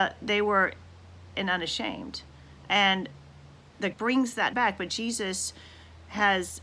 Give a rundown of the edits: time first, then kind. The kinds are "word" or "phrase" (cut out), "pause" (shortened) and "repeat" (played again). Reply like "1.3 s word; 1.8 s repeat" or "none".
1.3 s word; 2.6 s pause; 3.9 s word; 4.5 s word